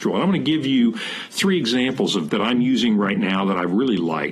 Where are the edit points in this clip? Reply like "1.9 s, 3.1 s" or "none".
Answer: 2.3 s

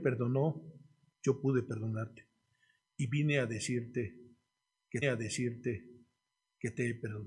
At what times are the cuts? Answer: 5.0 s

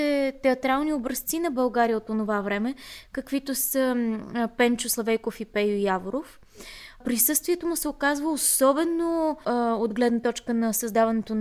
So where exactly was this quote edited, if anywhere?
9.4 s

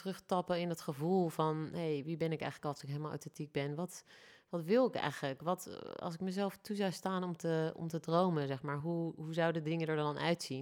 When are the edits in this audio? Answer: none

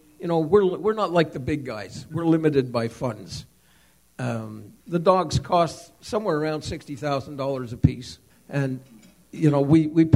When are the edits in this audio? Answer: 4.8 s, 8.3 s

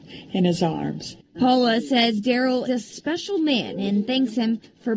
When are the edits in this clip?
1.3 s, 2.7 s

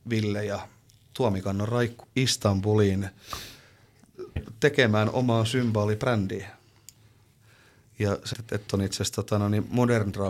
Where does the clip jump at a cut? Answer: 2.0 s, 4.4 s, 8.3 s, 8.7 s

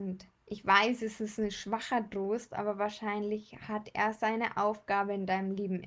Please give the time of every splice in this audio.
none

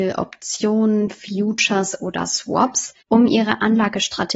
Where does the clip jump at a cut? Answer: 3.0 s

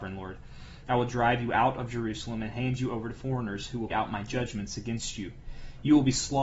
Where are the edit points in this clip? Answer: 3.9 s

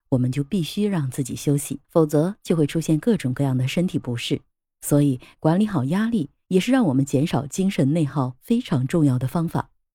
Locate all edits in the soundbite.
1.8 s, 4.5 s

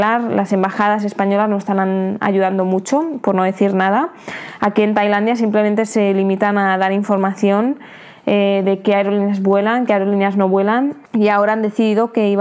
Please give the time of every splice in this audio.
11.1 s

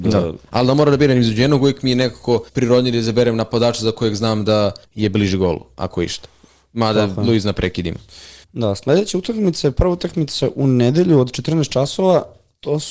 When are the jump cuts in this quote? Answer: 2.5 s, 4.8 s, 8.4 s

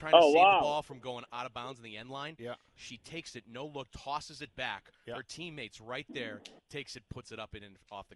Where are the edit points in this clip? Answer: 3.9 s

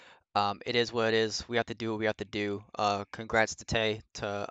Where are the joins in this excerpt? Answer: none

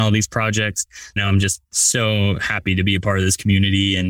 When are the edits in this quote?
1.2 s

